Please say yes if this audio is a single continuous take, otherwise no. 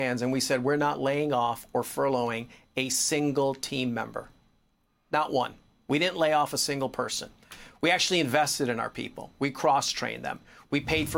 yes